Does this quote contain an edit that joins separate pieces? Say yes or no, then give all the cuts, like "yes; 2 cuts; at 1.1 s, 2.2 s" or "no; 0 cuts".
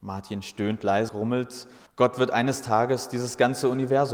yes; 2 cuts; at 1.1 s, 1.9 s